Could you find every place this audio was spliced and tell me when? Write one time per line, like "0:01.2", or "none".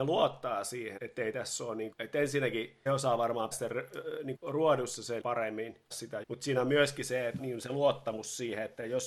0:01.0
0:01.9
0:02.9
0:03.5
0:04.3
0:05.2
0:05.9
0:06.2
0:07.4